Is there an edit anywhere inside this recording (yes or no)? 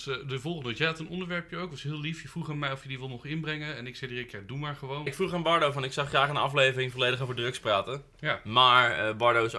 no